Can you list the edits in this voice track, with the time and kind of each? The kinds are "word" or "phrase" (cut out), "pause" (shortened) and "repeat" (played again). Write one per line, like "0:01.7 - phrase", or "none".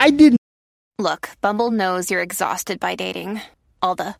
none